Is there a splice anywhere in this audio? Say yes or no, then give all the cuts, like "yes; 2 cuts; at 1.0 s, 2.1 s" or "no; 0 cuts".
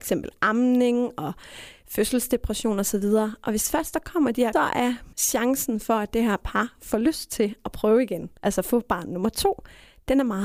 yes; 3 cuts; at 4.5 s, 5.1 s, 8.4 s